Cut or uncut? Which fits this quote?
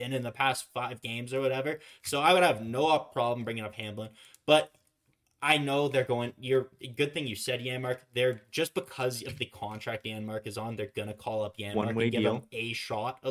uncut